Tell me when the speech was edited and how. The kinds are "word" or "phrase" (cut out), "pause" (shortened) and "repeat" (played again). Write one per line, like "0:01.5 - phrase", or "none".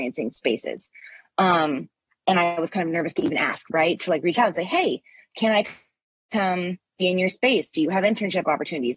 none